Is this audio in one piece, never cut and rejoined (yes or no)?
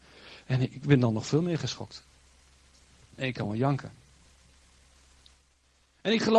yes